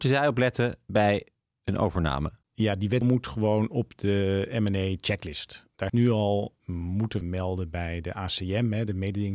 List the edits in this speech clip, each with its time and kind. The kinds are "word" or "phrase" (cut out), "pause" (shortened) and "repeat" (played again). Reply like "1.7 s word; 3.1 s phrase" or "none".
2.4 s pause; 3.0 s word; 5.9 s word; 6.6 s word; 7.2 s phrase